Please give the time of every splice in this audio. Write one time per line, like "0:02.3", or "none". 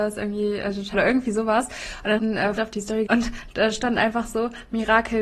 0:00.9
0:02.2
0:02.6
0:03.1